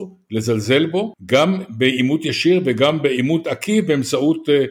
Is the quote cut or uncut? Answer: uncut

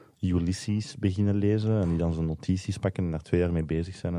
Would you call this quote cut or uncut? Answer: uncut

